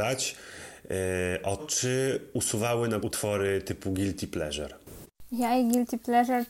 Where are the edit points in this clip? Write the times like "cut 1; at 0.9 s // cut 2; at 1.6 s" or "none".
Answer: cut 1; at 1.6 s // cut 2; at 3.0 s

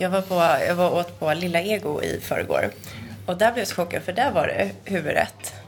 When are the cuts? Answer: none

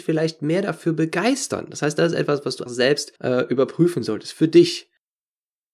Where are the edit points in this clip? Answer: cut 1; at 2.7 s // cut 2; at 3.2 s

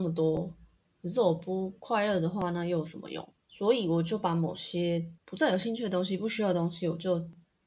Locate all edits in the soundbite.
cut 1; at 3.4 s // cut 2; at 5.2 s

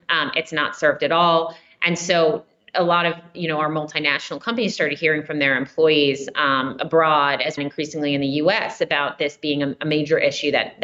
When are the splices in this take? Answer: cut 1; at 7.6 s

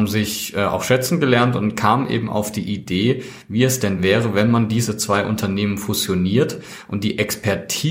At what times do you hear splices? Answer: none

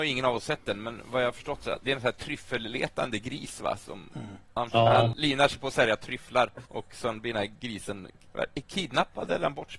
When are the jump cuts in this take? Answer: cut 1; at 6.7 s

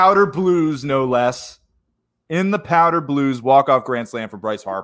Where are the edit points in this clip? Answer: none

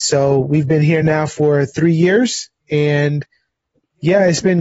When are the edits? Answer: none

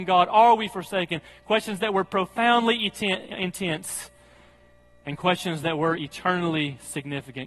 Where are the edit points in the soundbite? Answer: none

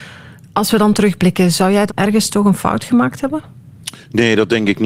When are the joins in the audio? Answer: cut 1; at 1.9 s

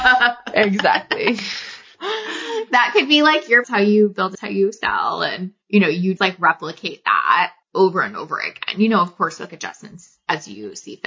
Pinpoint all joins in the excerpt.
cut 1; at 3.6 s // cut 2; at 4.3 s // cut 3; at 5.6 s // cut 4; at 6.2 s // cut 5; at 7.6 s // cut 6; at 9.5 s

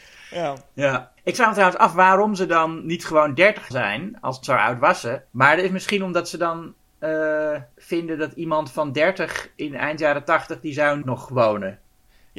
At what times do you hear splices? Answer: cut 1; at 1.2 s // cut 2; at 3.7 s // cut 3; at 4.4 s // cut 4; at 5.3 s // cut 5; at 7.7 s // cut 6; at 11.0 s

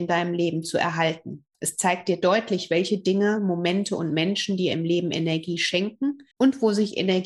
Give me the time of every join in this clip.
cut 1; at 1.5 s // cut 2; at 6.3 s

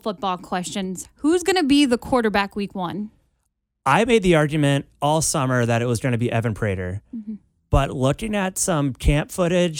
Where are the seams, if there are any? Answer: none

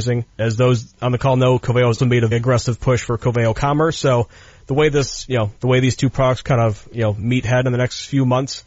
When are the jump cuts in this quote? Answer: cut 1; at 2.0 s // cut 2; at 2.3 s

